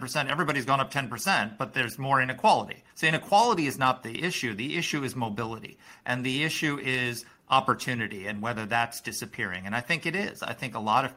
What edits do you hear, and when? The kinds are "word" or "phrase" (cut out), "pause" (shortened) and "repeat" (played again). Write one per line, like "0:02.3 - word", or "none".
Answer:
0:02.9 - pause